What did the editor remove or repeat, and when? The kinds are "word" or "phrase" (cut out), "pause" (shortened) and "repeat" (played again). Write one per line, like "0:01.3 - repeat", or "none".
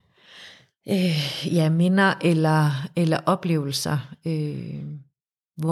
none